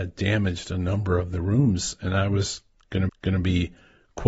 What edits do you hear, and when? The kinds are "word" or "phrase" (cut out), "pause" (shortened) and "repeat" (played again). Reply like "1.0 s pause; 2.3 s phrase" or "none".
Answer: 3.1 s repeat